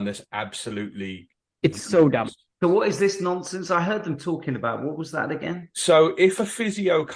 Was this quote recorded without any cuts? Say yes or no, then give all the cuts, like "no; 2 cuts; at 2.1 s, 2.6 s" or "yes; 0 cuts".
yes; 0 cuts